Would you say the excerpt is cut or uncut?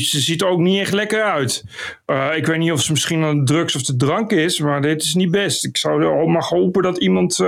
uncut